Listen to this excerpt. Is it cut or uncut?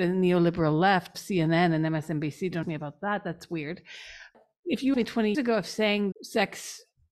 cut